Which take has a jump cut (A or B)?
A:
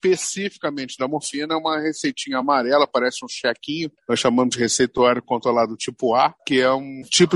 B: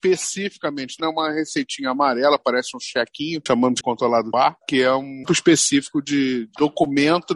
B